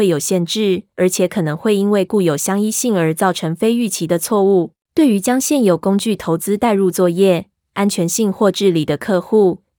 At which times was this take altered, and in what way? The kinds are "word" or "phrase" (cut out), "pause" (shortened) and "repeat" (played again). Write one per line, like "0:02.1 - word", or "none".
0:00.9 - pause
0:04.8 - pause